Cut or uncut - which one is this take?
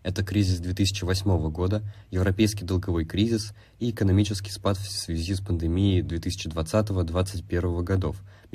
uncut